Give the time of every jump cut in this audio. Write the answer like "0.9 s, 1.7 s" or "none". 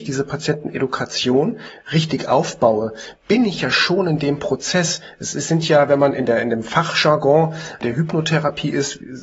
none